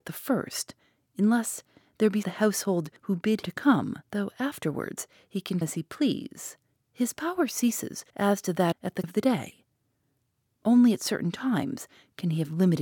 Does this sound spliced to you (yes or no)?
yes